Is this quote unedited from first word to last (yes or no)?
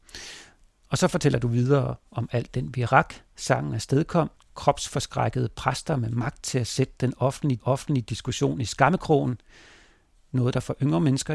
no